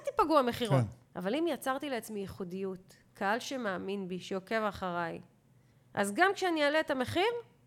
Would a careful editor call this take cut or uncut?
cut